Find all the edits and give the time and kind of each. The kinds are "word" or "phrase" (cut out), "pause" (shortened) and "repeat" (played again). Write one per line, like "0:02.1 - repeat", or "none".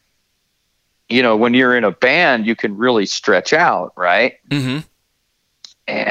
none